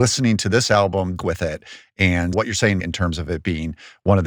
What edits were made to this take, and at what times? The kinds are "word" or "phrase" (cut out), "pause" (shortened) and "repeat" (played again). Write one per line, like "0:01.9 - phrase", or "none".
0:01.2 - phrase
0:02.3 - word
0:02.8 - phrase